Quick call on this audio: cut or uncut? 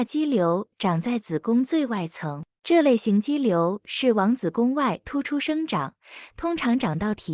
cut